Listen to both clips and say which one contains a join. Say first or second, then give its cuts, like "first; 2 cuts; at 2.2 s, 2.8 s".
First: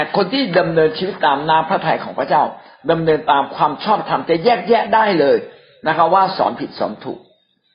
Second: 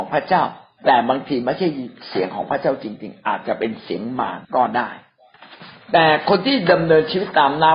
second; 1 cut; at 4.4 s